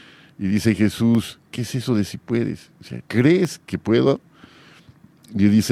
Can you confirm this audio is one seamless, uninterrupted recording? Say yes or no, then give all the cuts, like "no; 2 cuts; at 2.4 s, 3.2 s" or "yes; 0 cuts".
no; 2 cuts; at 1.5 s, 3.0 s